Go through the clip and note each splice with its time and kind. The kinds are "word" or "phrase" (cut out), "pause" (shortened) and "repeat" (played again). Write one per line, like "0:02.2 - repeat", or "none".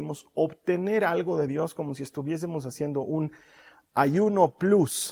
none